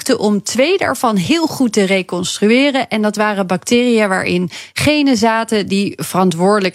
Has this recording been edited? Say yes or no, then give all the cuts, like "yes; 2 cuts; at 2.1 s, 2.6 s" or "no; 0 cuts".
no; 0 cuts